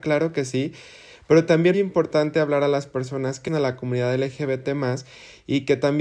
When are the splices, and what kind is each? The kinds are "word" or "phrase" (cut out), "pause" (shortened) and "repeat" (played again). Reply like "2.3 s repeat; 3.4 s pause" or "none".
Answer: 1.7 s word; 3.5 s phrase